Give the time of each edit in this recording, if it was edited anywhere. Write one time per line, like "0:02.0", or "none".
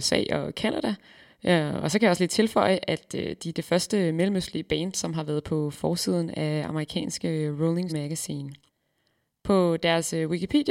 0:07.9